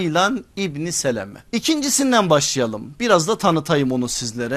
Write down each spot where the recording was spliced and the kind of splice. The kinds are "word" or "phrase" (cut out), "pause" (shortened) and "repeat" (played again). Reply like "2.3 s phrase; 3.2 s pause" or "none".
1.5 s pause